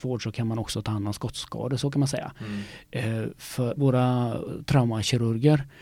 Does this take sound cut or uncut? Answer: cut